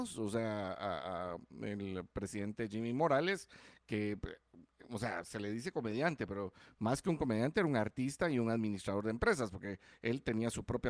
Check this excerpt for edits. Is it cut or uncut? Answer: uncut